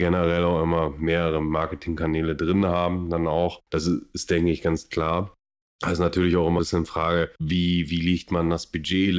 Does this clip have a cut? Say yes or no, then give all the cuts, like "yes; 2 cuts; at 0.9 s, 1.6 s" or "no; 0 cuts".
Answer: yes; 2 cuts; at 3.7 s, 6.6 s